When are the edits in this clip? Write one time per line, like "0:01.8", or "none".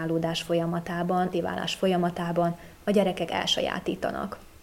0:01.3